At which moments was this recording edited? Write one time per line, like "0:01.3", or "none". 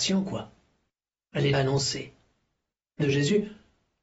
0:01.5
0:03.0